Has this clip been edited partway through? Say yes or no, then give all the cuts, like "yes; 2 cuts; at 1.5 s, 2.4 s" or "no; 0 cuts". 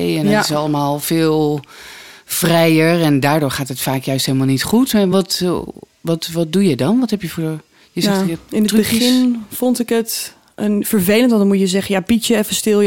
no; 0 cuts